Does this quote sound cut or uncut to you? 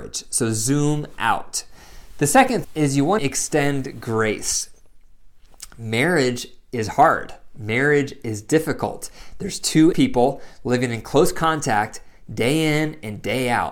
cut